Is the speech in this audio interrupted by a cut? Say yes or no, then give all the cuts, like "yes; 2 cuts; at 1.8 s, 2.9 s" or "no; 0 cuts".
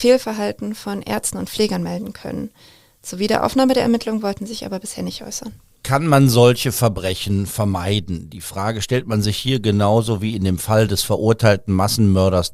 no; 0 cuts